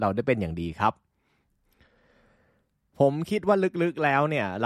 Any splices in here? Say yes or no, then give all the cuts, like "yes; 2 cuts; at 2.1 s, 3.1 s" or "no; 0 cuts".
no; 0 cuts